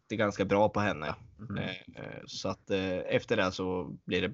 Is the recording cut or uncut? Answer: cut